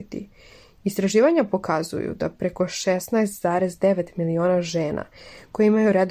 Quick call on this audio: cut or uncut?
uncut